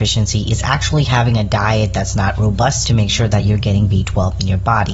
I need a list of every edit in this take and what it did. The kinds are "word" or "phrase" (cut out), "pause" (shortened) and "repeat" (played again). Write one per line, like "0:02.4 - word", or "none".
0:02.8 - word